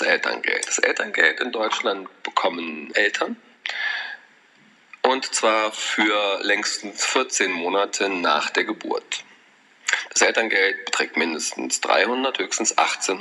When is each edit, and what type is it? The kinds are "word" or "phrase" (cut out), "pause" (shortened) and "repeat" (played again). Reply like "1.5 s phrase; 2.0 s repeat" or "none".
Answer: 2.9 s word

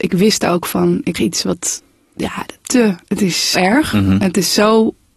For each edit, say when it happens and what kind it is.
1.1 s word; 2.6 s word; 3.5 s word

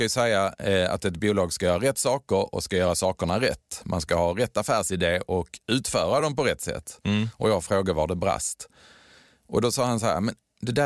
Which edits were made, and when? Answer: none

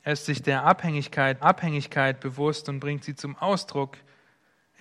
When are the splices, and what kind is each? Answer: 1.4 s repeat

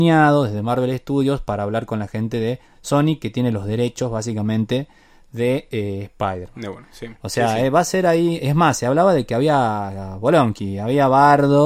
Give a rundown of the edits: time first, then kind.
none

